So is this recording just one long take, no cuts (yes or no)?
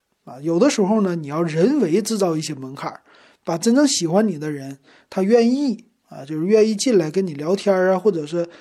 yes